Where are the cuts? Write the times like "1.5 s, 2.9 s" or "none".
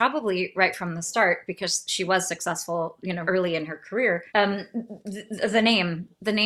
3.2 s, 4.3 s